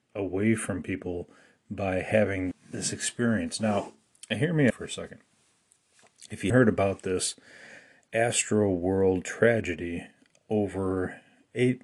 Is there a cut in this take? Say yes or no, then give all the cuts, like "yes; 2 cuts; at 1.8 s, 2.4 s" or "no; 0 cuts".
yes; 3 cuts; at 2.5 s, 4.7 s, 6.5 s